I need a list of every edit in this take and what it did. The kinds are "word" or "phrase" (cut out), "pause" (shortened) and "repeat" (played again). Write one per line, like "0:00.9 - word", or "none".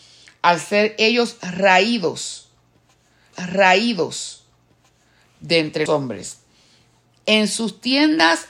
0:03.3 - repeat
0:05.9 - word